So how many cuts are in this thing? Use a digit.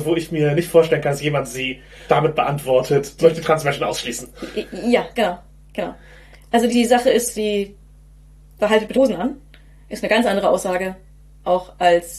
6